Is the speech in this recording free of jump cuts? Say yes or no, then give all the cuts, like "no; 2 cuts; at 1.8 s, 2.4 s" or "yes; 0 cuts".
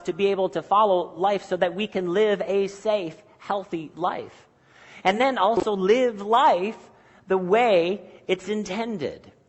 yes; 0 cuts